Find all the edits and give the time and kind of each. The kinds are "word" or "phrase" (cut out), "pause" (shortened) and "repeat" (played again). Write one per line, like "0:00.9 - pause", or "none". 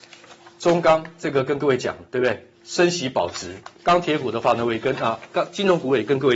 0:02.1 - pause
0:02.5 - pause
0:03.8 - pause